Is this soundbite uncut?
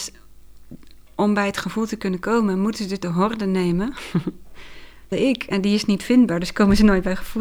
no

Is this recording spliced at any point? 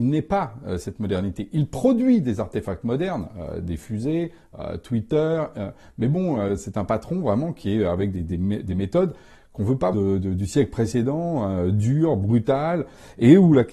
yes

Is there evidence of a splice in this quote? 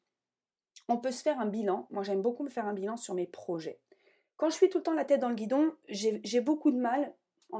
no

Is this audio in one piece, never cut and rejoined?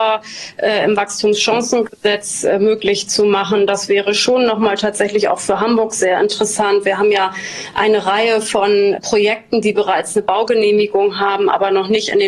yes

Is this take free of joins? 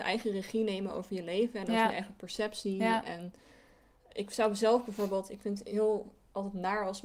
yes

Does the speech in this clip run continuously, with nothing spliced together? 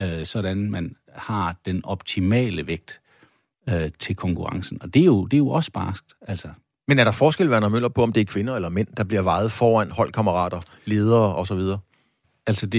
yes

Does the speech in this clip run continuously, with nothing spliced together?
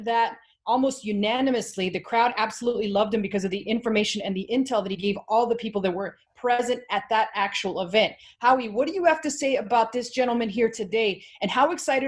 yes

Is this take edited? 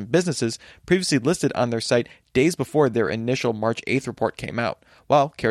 no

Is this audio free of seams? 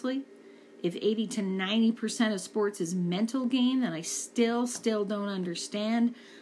yes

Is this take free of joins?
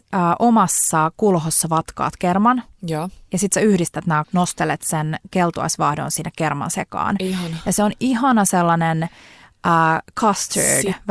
no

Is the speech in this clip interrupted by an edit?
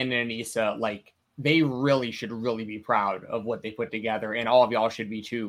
no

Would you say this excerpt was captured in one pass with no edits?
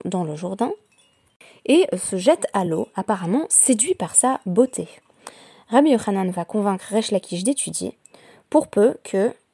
yes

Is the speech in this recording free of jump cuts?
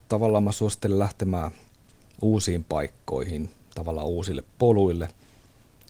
yes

